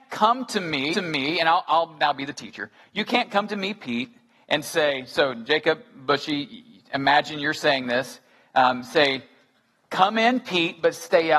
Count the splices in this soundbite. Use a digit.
1